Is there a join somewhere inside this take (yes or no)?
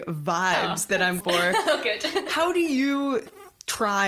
yes